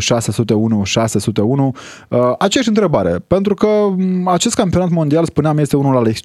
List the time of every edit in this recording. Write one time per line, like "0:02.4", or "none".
none